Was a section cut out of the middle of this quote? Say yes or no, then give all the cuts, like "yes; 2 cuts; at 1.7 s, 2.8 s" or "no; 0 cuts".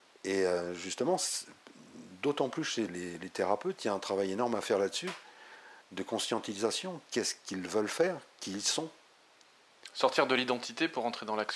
yes; 2 cuts; at 2.9 s, 5.8 s